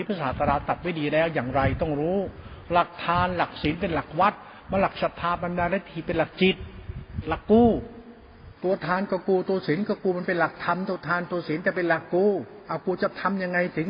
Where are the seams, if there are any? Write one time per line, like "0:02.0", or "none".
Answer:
0:08.6